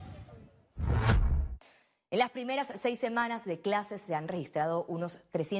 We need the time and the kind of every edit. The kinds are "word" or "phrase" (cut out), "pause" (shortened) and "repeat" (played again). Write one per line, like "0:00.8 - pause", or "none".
none